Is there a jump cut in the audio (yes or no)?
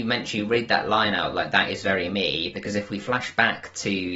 no